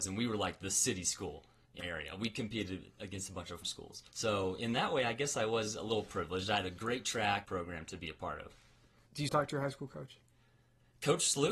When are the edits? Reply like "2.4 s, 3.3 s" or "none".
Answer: 1.8 s, 3.6 s, 4.1 s, 7.4 s, 9.3 s